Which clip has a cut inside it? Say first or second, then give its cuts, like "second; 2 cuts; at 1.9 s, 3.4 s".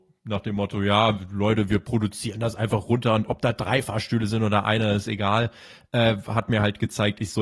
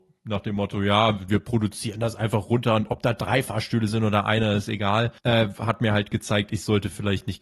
second; 2 cuts; at 1.3 s, 5.2 s